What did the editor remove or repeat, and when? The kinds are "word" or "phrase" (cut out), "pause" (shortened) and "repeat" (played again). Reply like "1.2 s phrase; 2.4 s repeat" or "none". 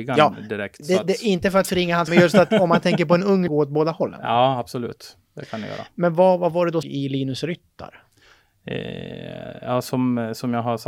2.1 s word; 3.5 s phrase; 6.8 s phrase; 8.3 s pause